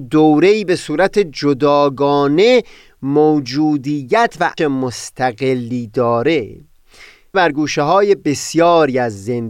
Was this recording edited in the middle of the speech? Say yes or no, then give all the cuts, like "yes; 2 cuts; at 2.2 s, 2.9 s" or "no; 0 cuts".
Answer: yes; 2 cuts; at 4.6 s, 7.3 s